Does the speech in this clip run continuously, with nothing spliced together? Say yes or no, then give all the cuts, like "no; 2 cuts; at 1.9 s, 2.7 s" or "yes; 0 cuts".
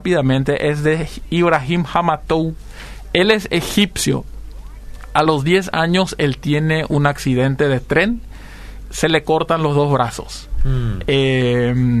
yes; 0 cuts